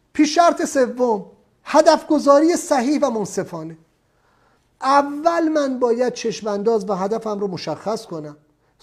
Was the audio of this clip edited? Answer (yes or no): no